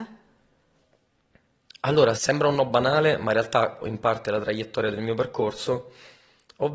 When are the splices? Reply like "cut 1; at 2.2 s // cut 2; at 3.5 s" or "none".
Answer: cut 1; at 2.1 s // cut 2; at 3.8 s